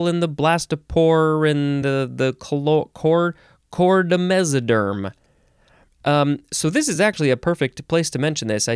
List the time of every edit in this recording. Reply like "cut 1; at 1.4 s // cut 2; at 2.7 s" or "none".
none